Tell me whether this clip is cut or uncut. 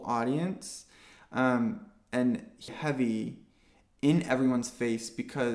cut